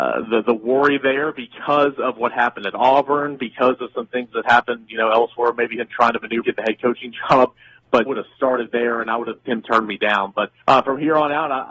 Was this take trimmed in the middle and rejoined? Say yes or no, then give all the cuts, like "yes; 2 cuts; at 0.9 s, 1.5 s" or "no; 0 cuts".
yes; 4 cuts; at 6.4 s, 8.1 s, 9.5 s, 10.6 s